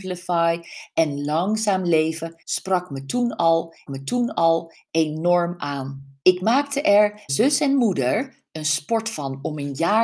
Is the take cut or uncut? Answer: cut